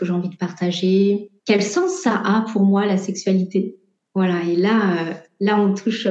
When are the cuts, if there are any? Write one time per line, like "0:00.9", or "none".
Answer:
0:01.4
0:04.0